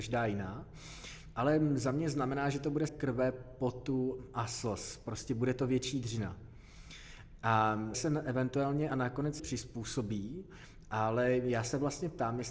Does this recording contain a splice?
yes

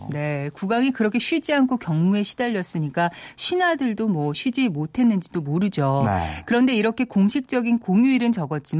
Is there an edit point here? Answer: no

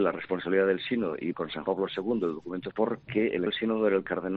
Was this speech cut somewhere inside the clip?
yes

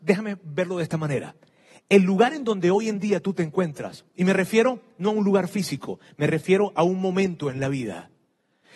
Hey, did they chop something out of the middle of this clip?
no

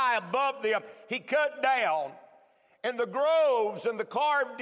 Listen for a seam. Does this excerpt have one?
no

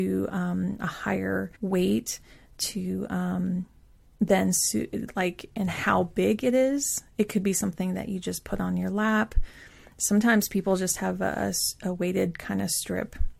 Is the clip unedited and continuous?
no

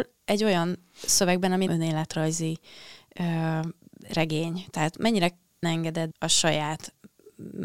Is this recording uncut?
no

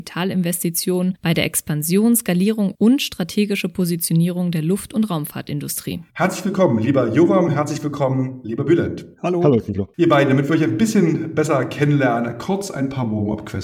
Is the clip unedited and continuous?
no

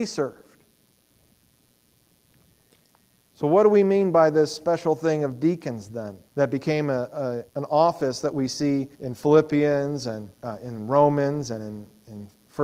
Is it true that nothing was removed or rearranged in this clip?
no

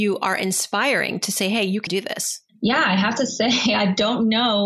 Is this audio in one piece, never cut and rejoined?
no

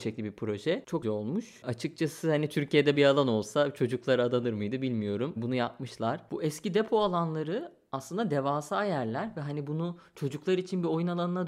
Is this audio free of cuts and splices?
no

